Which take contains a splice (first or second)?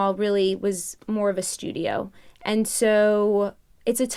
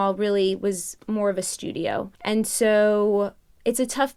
second